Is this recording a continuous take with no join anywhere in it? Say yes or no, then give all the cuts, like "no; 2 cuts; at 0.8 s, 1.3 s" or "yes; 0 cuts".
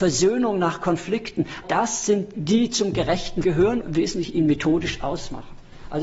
no; 4 cuts; at 1.6 s, 2.3 s, 3.4 s, 3.8 s